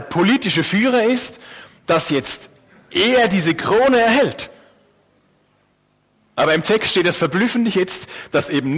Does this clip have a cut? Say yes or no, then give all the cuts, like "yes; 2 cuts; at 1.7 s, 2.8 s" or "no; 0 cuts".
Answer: no; 0 cuts